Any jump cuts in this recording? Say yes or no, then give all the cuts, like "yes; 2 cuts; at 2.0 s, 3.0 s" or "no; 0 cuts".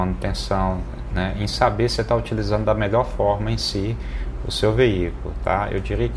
no; 0 cuts